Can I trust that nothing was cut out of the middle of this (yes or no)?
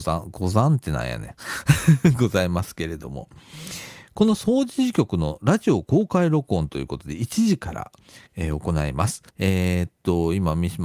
no